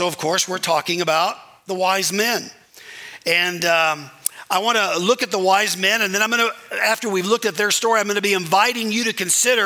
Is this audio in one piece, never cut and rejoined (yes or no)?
yes